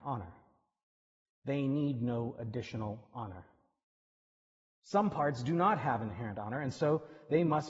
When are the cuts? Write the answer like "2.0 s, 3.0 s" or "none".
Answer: none